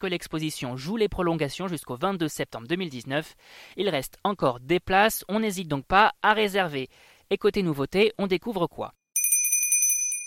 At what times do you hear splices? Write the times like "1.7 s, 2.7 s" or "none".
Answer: none